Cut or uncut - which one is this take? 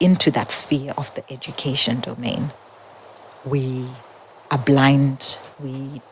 uncut